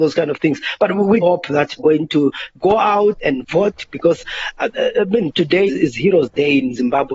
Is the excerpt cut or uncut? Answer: cut